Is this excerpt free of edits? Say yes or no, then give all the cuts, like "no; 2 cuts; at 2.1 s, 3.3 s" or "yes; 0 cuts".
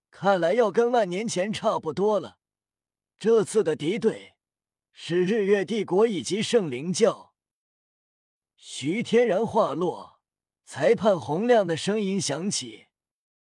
yes; 0 cuts